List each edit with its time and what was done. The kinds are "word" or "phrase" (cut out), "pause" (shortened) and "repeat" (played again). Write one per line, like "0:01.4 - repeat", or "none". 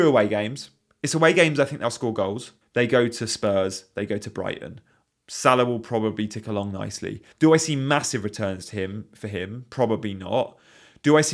0:02.6 - pause
0:07.3 - pause

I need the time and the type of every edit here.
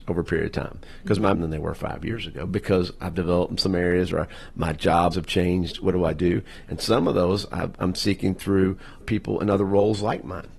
0:01.3 - phrase
0:05.1 - word
0:09.0 - word

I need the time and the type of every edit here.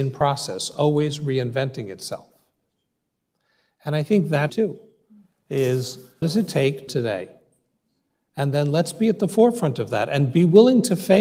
0:04.5 - phrase
0:06.2 - word
0:06.9 - phrase

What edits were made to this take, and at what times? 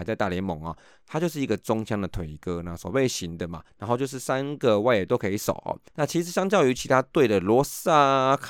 0:03.7 - pause
0:05.9 - pause

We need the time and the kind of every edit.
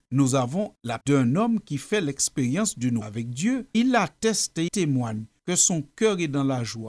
0:01.0 - word
0:03.0 - word
0:03.7 - word
0:04.7 - word

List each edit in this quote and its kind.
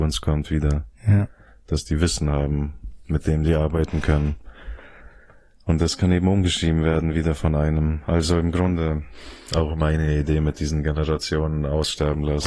none

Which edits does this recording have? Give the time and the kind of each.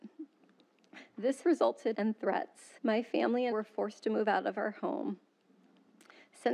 0:01.4 - word
0:01.9 - phrase
0:02.8 - pause
0:03.5 - word

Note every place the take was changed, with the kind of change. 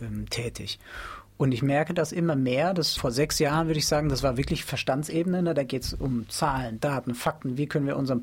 0:03.0 - word

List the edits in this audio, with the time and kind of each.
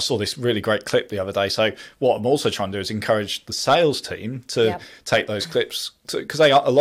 none

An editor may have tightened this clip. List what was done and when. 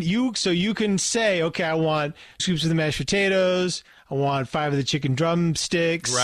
0:02.4 - word

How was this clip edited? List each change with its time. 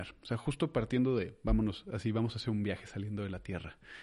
none

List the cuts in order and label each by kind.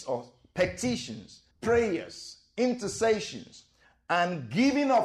0:01.5 - pause

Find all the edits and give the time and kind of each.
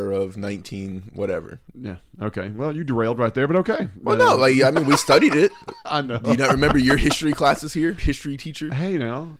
0:08.0 - word

